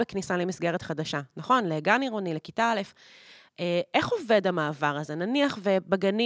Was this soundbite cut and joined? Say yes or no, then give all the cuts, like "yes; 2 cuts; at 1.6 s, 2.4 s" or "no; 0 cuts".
no; 0 cuts